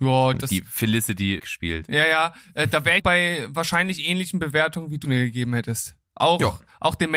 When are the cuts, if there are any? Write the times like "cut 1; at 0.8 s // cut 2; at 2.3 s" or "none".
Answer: cut 1; at 1.4 s // cut 2; at 3.0 s // cut 3; at 5.0 s